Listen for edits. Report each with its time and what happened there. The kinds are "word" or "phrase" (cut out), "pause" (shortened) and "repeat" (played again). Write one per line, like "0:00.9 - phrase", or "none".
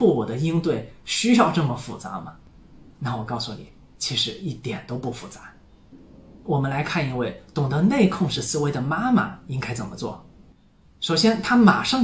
none